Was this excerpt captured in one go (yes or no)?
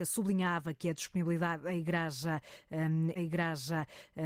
no